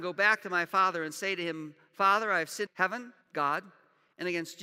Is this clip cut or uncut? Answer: cut